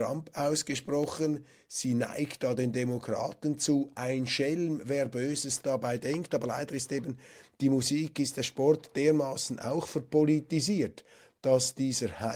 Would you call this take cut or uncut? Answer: uncut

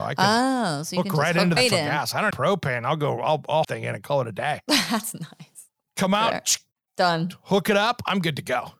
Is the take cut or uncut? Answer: cut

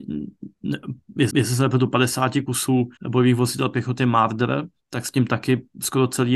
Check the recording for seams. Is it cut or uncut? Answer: cut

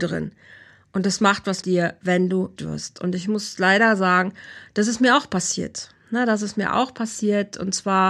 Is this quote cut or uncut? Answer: cut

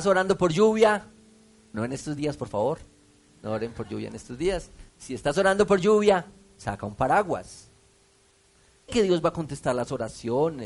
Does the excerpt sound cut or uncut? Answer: cut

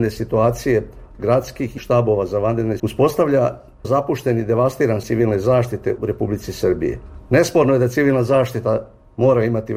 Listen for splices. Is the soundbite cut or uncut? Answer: cut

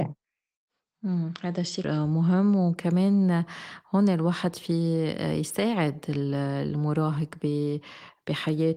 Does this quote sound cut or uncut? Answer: cut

